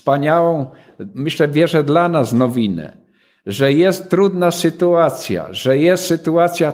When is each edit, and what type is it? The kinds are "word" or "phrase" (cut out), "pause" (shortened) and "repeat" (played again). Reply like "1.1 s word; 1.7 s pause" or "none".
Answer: none